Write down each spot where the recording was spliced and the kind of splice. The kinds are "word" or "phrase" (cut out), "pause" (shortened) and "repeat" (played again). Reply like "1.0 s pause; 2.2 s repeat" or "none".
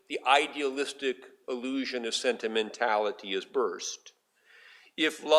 none